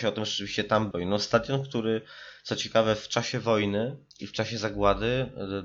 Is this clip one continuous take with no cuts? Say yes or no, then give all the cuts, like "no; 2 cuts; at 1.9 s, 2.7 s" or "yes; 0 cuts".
no; 2 cuts; at 0.9 s, 4.1 s